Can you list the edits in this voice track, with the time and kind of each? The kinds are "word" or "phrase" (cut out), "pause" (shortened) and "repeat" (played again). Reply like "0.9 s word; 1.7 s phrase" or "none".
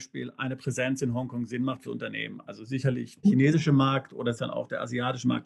1.8 s phrase; 3.2 s word; 4.3 s word